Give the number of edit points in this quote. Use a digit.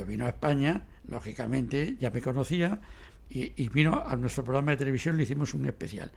0